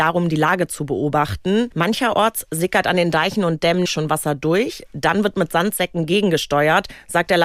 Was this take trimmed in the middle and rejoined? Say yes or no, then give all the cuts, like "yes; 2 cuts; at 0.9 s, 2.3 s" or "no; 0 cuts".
yes; 1 cut; at 3.9 s